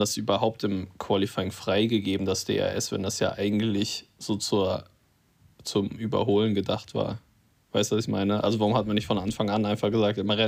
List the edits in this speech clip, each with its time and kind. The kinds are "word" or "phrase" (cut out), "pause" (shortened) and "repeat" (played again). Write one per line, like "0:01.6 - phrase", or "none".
none